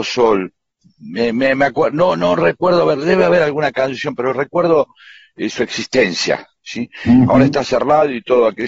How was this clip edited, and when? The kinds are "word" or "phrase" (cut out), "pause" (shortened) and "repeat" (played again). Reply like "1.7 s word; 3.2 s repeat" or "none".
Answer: none

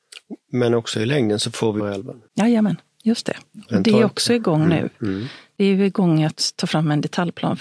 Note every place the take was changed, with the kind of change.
1.8 s phrase

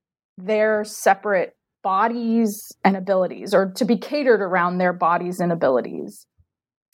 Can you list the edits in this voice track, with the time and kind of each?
none

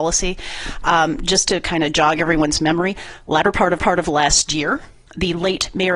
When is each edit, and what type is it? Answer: 3.8 s repeat; 5.1 s word

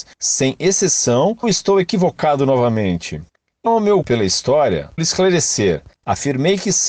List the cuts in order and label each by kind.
1.4 s word; 3.7 s word; 4.0 s word; 5.0 s word

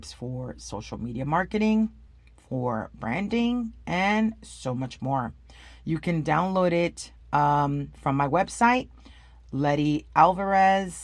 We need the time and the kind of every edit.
none

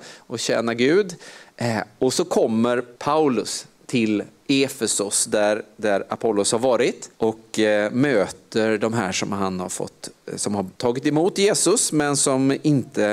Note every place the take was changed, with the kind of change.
3.0 s pause; 7.1 s pause; 10.7 s pause

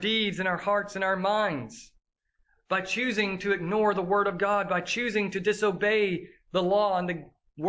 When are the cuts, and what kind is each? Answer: none

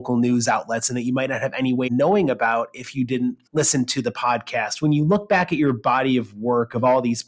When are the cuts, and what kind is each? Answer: 1.9 s word; 3.5 s pause

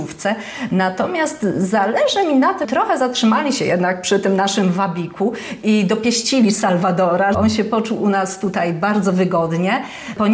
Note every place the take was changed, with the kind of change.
2.6 s word; 7.3 s word

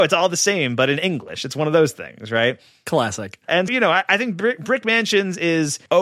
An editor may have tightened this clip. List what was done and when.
3.7 s word

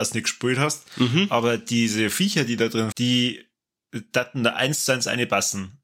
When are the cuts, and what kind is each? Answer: 2.9 s word

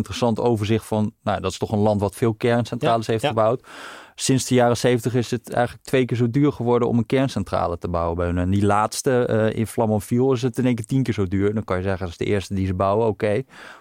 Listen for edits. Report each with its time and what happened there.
none

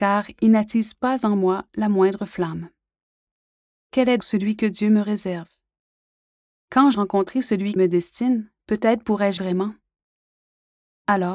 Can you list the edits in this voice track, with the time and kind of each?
4.2 s word; 6.9 s word; 7.8 s word; 9.4 s word

